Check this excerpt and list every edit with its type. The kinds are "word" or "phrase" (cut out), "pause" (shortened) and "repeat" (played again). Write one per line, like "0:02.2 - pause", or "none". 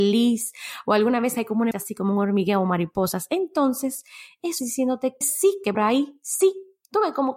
0:01.7 - word
0:04.6 - word
0:05.2 - word
0:05.7 - word